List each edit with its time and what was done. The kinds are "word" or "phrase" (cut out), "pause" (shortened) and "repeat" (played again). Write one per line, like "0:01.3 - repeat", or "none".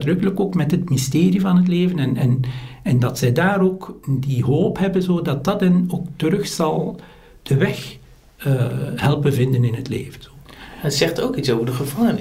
none